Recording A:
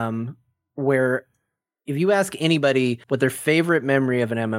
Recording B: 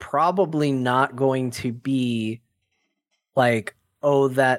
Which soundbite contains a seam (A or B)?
A